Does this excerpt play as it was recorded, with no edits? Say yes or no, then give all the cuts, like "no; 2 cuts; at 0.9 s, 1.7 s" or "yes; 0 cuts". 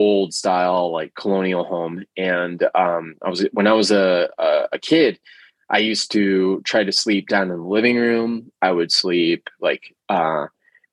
yes; 0 cuts